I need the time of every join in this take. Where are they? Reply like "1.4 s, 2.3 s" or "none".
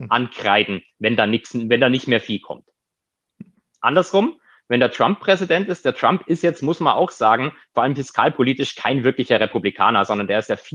none